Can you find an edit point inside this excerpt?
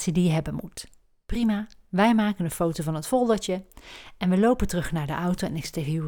no; 0 cuts

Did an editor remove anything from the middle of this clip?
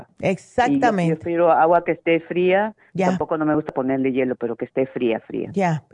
no; 0 cuts

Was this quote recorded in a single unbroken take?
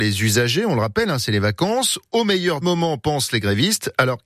no; 1 cut; at 2.6 s

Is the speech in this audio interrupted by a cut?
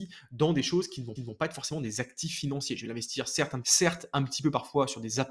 yes; 2 cuts; at 1.2 s, 3.6 s

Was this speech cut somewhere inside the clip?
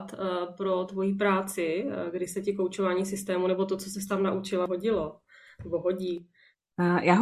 no; 0 cuts

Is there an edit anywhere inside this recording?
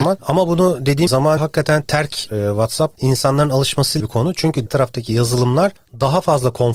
yes; 5 cuts; at 1.1 s, 1.4 s, 2.3 s, 4.0 s, 4.7 s

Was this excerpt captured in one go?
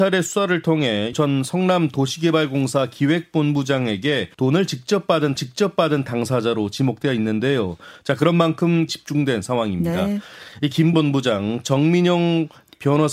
no; 5 cuts; at 1.1 s, 4.3 s, 5.4 s, 8.9 s, 10.9 s

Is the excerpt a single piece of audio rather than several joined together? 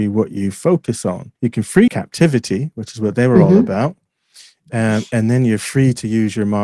no; 2 cuts; at 1.4 s, 1.9 s

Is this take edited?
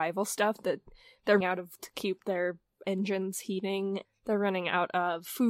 yes; 4 cuts; at 1.4 s, 1.8 s, 2.8 s, 4.0 s

